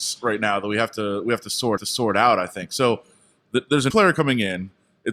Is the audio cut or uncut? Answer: cut